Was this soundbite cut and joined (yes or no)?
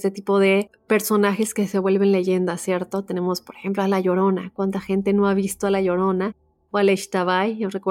no